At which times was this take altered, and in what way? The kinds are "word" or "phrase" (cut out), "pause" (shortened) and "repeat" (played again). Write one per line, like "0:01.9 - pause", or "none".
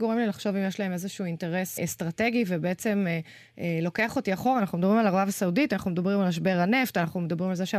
0:01.8 - word